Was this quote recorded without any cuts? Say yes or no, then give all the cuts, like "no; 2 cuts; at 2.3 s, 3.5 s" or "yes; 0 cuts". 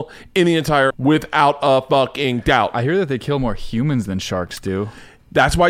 no; 1 cut; at 0.9 s